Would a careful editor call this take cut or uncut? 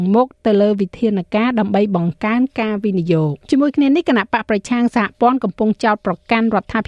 cut